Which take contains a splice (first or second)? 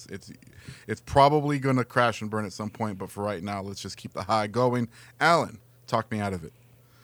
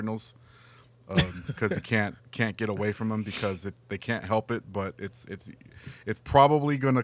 second